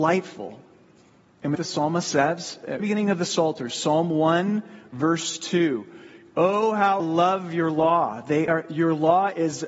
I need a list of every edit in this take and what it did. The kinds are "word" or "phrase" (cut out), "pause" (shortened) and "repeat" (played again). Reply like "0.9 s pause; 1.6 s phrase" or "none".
1.5 s phrase; 2.8 s word; 7.0 s word; 8.5 s word

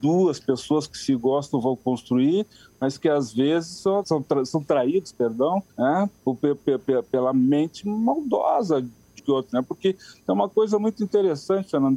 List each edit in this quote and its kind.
4.0 s phrase; 5.7 s pause; 9.2 s word

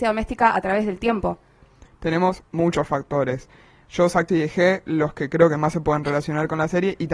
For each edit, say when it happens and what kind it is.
4.3 s word

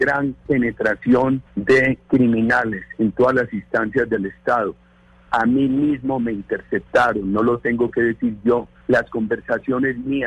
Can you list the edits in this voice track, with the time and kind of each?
1.5 s pause; 8.8 s pause

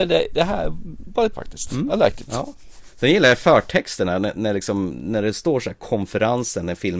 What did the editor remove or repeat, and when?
1.3 s word

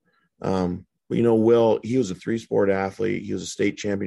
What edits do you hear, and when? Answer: 1.0 s pause

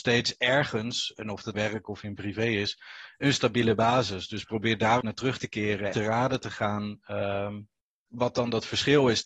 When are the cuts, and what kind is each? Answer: 1.5 s phrase; 5.0 s word; 5.9 s phrase

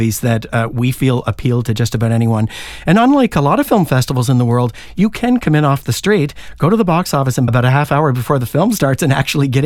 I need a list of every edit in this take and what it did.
7.5 s phrase

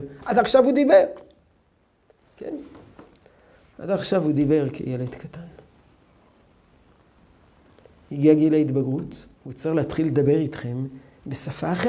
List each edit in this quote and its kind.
9.3 s pause

